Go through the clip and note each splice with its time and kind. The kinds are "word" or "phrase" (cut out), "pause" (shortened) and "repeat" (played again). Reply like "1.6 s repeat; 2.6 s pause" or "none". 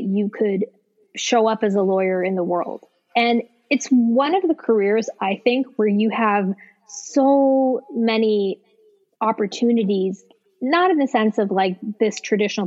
none

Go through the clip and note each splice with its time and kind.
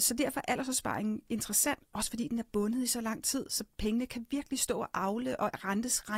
none

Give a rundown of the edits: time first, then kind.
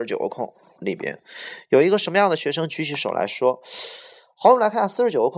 none

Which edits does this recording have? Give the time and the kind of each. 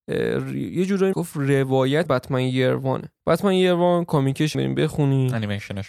1.1 s word; 2.1 s word; 3.2 s pause; 4.5 s phrase

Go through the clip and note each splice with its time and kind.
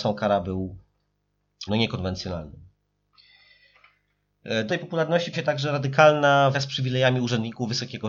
1.7 s word; 4.7 s word; 5.3 s word; 6.5 s word

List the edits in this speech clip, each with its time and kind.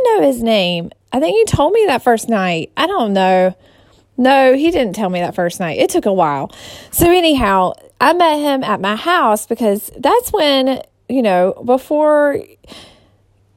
1.0 s pause

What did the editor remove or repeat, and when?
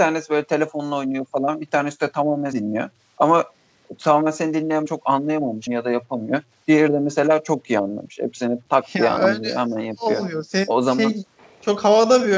2.5 s word; 4.9 s word; 5.7 s word

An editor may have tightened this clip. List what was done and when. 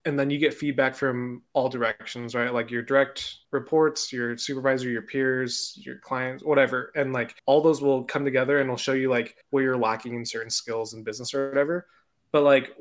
3.4 s pause; 7.4 s pause; 9.4 s pause

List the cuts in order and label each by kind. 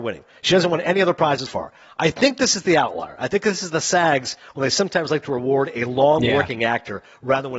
1.5 s word

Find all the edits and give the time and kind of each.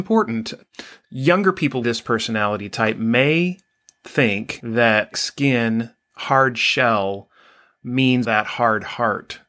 1.8 s word; 5.1 s word; 8.2 s word

